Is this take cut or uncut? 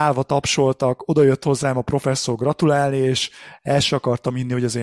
uncut